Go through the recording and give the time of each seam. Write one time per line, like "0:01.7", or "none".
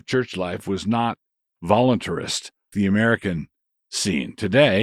0:02.7